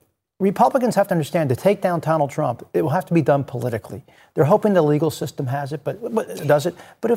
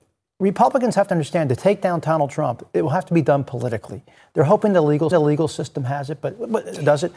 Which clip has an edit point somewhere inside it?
second; 1 cut; at 5.1 s

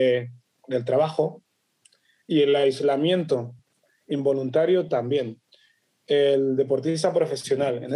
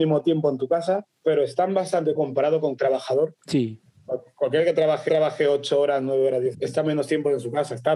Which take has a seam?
second; 6 cuts; at 1.2 s, 2.2 s, 2.8 s, 3.4 s, 5.1 s, 6.5 s

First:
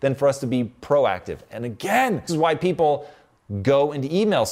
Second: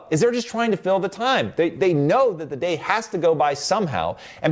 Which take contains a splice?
first; 1 cut; at 2.3 s

